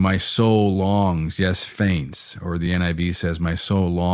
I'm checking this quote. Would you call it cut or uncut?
uncut